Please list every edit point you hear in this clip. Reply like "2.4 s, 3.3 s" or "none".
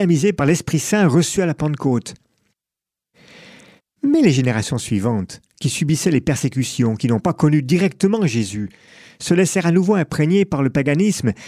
none